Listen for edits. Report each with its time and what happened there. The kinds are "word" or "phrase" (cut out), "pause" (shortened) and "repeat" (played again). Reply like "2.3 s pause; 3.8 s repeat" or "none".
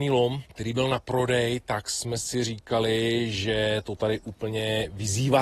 none